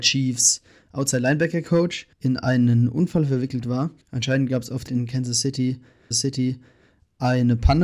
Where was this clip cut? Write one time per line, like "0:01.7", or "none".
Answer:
0:02.1
0:04.0
0:04.9
0:06.1